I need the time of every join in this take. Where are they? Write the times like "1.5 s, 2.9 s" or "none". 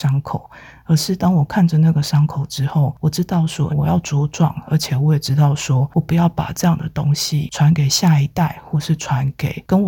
3.7 s